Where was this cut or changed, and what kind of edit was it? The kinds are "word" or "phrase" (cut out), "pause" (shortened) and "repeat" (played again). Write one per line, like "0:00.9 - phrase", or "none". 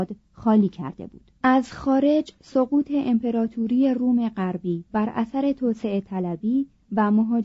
0:01.4 - pause
0:04.9 - pause